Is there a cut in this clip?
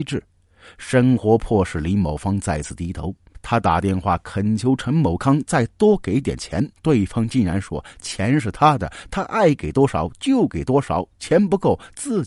yes; 1 cut; at 6.7 s

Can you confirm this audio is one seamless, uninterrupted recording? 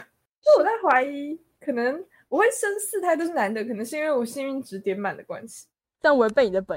yes; 0 cuts

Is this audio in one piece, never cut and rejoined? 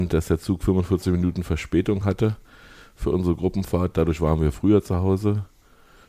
yes; 0 cuts

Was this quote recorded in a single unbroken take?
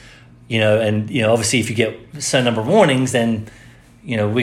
yes; 0 cuts

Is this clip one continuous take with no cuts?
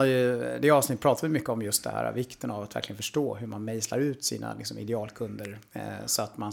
yes; 0 cuts

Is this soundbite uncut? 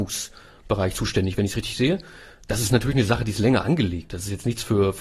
yes; 0 cuts

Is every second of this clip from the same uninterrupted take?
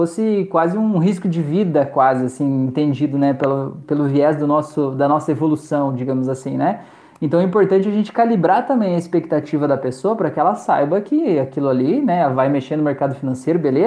yes; 0 cuts

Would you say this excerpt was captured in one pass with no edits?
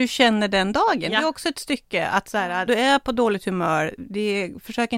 no; 2 cuts; at 2.7 s, 4.0 s

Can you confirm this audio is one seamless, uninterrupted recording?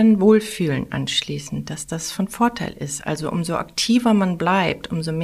yes; 0 cuts

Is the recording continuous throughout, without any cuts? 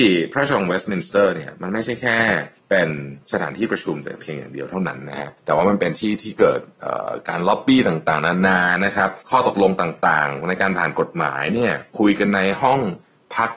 no; 5 cuts; at 2.6 s, 3.2 s, 5.4 s, 9.2 s, 11.9 s

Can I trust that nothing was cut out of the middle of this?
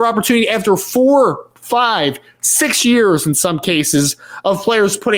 yes; 0 cuts

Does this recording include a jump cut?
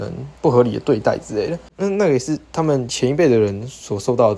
yes; 1 cut; at 1.7 s

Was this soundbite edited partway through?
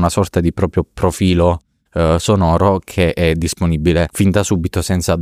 no; 0 cuts

